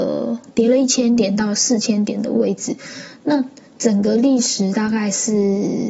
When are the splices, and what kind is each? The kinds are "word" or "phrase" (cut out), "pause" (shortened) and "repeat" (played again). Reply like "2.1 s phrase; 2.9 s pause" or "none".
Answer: none